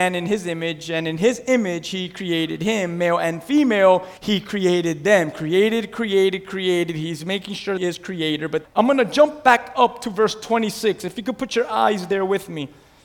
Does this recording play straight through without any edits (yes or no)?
no